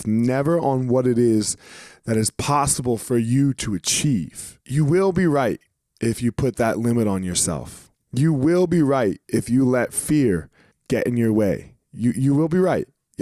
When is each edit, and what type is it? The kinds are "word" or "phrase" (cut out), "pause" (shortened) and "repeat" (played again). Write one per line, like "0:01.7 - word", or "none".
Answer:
0:04.6 - pause
0:07.9 - pause
0:09.2 - pause
0:10.7 - pause